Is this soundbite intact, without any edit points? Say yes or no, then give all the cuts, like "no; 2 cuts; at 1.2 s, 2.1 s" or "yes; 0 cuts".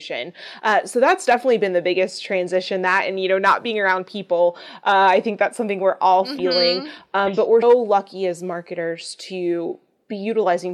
no; 1 cut; at 7.6 s